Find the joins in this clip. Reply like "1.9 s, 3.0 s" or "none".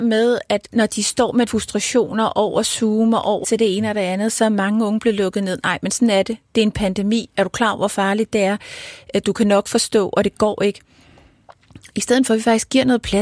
1.5 s, 3.4 s